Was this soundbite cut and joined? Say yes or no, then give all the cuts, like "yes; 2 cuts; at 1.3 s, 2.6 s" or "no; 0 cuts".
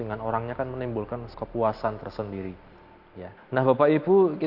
yes; 2 cuts; at 1.3 s, 3.4 s